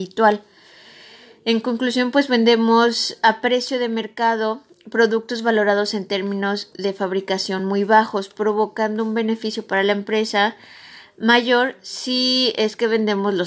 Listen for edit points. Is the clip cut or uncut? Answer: uncut